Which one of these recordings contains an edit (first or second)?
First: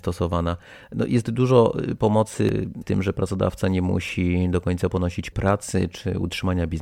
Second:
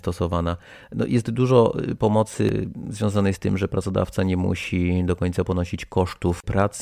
first